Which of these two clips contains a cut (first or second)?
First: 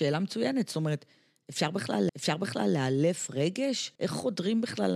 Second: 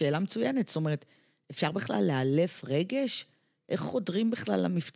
first